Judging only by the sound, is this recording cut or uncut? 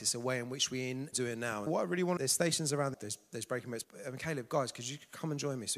cut